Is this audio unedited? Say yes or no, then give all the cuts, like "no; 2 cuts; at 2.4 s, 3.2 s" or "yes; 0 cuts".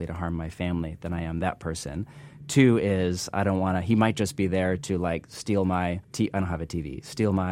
no; 1 cut; at 6.0 s